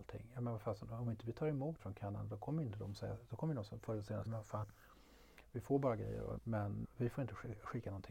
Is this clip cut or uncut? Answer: cut